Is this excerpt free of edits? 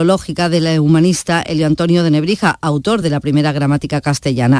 yes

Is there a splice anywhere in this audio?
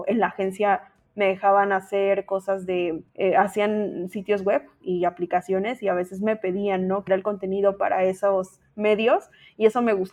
yes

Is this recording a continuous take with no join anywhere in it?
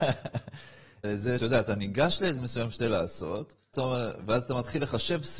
no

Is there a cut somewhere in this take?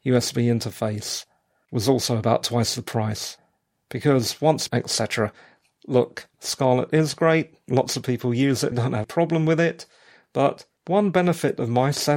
yes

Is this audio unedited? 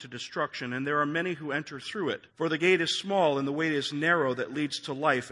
no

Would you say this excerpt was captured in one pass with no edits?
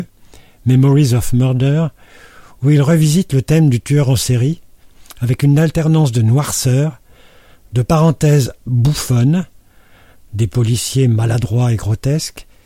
yes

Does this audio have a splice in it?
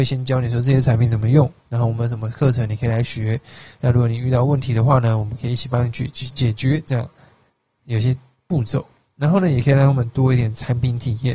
no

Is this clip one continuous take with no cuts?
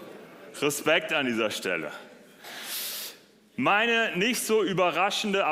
yes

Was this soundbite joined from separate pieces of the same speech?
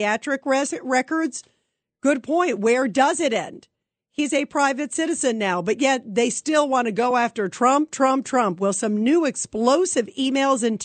no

